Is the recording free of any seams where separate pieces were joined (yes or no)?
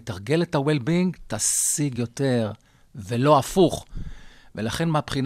yes